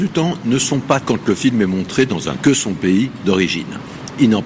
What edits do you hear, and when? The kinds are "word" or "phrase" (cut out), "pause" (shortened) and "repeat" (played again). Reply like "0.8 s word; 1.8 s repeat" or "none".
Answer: 1.0 s word; 2.4 s phrase